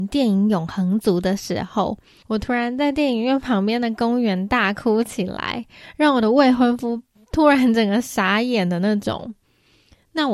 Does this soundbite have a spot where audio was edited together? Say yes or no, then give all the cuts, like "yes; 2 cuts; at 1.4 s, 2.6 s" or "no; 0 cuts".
no; 0 cuts